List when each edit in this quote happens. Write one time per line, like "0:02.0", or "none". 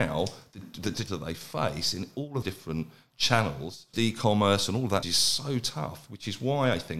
0:01.1
0:02.4
0:03.9
0:05.0